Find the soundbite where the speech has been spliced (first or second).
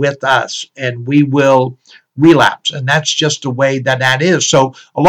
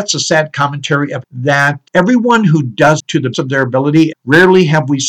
second